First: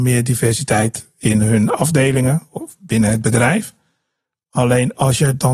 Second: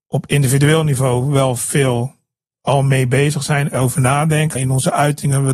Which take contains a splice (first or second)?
second